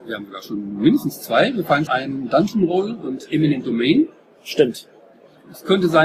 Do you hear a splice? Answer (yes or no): yes